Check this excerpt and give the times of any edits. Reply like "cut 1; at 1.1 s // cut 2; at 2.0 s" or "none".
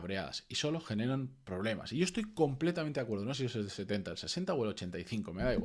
cut 1; at 3.3 s